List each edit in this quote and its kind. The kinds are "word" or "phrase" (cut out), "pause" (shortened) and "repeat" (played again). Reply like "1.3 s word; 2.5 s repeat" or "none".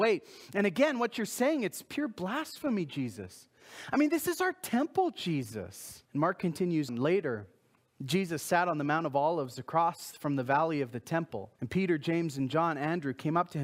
6.0 s pause; 6.9 s word; 11.6 s pause